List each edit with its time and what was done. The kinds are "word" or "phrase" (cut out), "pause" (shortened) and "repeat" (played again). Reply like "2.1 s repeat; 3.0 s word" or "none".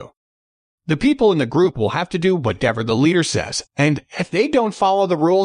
3.7 s pause

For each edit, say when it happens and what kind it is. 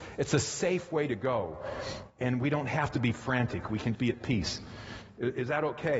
3.9 s word

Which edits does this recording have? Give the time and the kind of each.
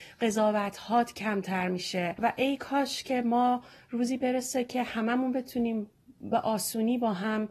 none

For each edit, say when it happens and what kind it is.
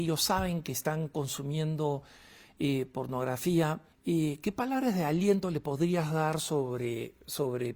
3.9 s pause

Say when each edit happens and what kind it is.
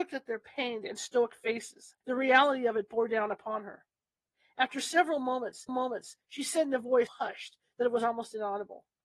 2.0 s pause; 5.7 s repeat; 7.1 s word

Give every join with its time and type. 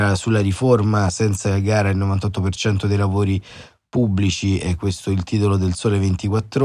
none

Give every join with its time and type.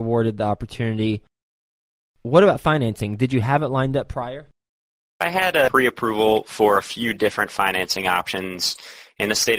none

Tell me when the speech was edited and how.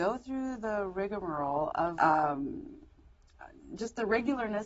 2.0 s word

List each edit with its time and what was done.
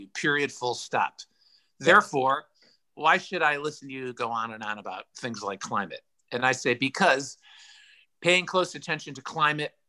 none

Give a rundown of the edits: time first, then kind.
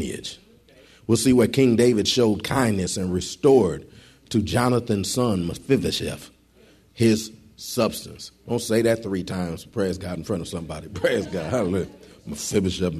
none

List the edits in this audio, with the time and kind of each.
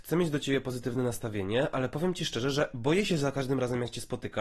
none

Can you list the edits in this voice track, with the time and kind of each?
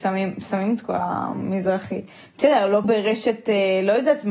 2.8 s word

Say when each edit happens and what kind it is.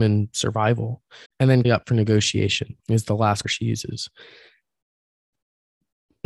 1.3 s pause; 1.6 s word; 2.8 s pause; 3.4 s word

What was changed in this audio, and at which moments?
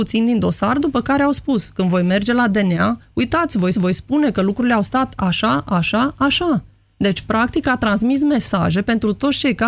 3.7 s repeat

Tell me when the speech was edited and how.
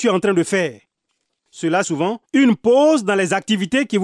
1.8 s word; 2.2 s pause

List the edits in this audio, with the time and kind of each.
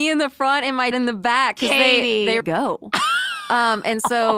0.9 s word; 2.4 s phrase

